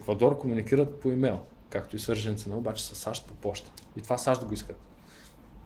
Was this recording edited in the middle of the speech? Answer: no; 0 cuts

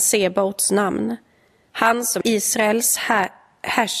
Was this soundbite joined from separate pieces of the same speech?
yes; 1 cut; at 2.2 s

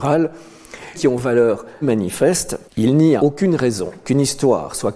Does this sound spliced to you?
yes; 5 cuts; at 0.9 s, 1.8 s, 2.7 s, 3.2 s, 4.0 s

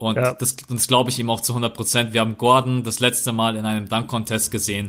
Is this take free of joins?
yes; 0 cuts

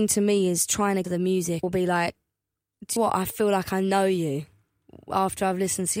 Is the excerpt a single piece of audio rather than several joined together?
no; 3 cuts; at 1.0 s, 1.6 s, 3.0 s

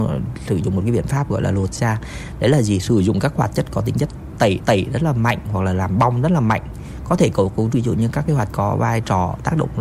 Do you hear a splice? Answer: yes; 3 cuts; at 4.6 s, 7.7 s, 8.5 s

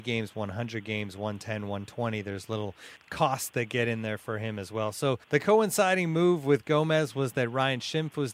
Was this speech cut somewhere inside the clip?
yes; 2 cuts; at 3.0 s, 5.2 s

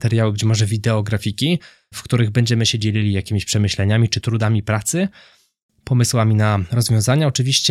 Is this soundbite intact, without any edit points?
yes; 0 cuts

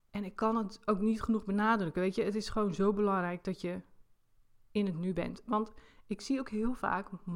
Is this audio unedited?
yes; 0 cuts

